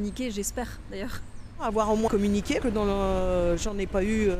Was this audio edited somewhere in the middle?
yes; 2 cuts; at 2.1 s, 2.6 s

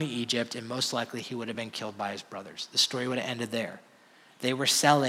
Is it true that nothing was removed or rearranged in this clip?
yes; 0 cuts

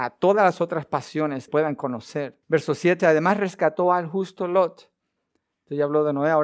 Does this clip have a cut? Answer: yes; 3 cuts; at 1.5 s, 2.4 s, 3.0 s

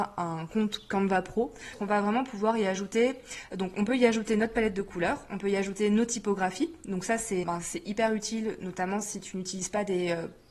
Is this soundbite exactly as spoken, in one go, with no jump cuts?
no; 1 cut; at 7.4 s

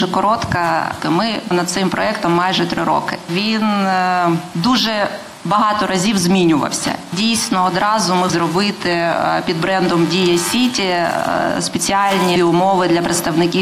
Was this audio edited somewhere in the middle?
yes; 3 cuts; at 1.5 s, 8.3 s, 12.4 s

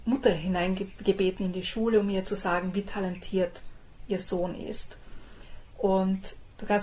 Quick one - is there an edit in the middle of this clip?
no; 0 cuts

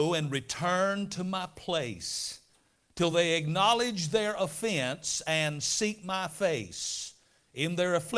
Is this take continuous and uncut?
yes; 0 cuts

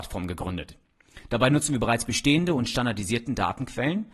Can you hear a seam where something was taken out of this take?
no; 0 cuts

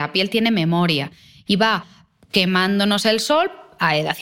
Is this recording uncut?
yes; 0 cuts

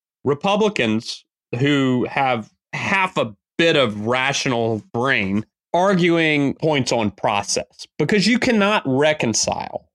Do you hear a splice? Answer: yes; 1 cut; at 4.9 s

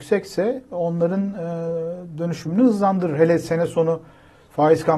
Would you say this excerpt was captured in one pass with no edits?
yes; 0 cuts

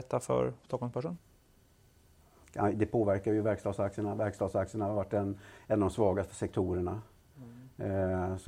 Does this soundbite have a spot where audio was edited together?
no; 0 cuts

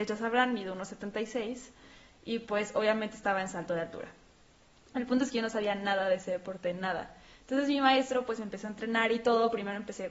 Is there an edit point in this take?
no; 0 cuts

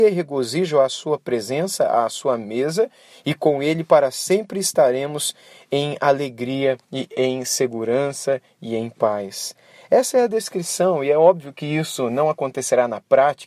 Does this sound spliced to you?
yes; 1 cut; at 6.8 s

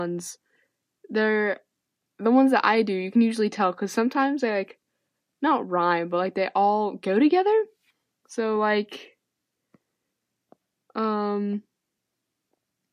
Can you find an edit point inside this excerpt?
no; 0 cuts

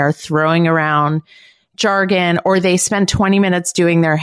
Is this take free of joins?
yes; 0 cuts

